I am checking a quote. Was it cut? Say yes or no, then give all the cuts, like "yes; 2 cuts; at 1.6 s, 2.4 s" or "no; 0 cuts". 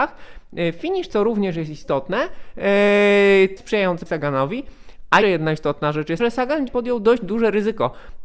yes; 6 cuts; at 1.1 s, 3.6 s, 4.1 s, 5.2 s, 6.2 s, 6.7 s